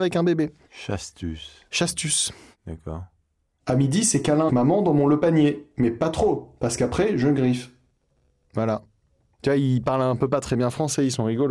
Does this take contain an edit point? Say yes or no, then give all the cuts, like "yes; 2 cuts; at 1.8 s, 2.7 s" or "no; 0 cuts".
yes; 1 cut; at 4.5 s